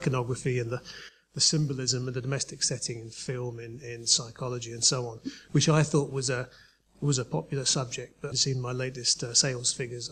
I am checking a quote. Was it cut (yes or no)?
yes